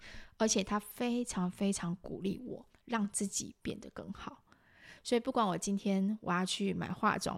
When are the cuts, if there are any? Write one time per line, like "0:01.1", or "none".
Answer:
0:02.7